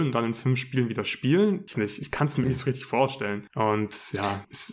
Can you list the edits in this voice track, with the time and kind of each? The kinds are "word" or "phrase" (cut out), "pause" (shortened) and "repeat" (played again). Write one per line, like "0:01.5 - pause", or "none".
0:01.7 - word
0:02.4 - word

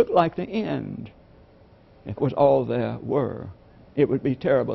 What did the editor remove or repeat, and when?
0:02.2 - word

